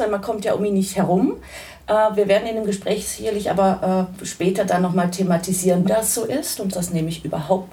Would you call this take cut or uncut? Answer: cut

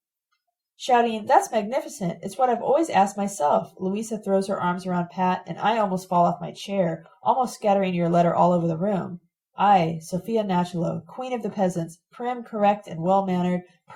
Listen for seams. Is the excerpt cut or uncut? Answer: uncut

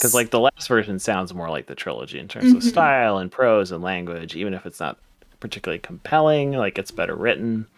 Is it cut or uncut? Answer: uncut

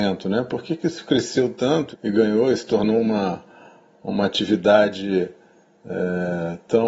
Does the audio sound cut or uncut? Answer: cut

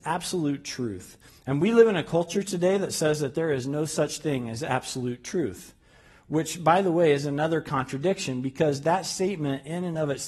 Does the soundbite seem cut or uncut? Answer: uncut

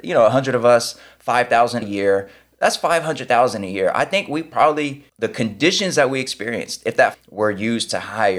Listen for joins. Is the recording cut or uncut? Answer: cut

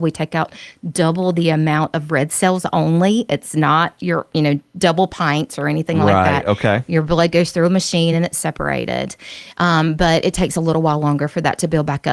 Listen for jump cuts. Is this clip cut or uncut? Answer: uncut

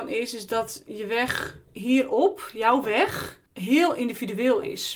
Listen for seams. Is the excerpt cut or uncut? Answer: cut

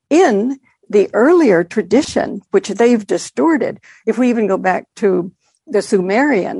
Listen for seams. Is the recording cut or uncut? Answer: uncut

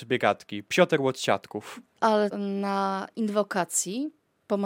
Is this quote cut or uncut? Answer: cut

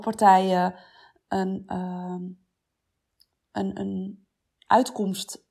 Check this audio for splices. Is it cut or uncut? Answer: uncut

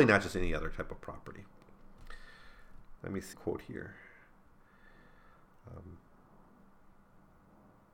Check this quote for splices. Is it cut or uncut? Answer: cut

